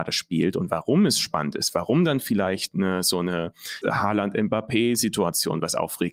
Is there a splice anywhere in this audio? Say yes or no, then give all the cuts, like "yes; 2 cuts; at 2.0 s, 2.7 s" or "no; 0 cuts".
yes; 1 cut; at 3.8 s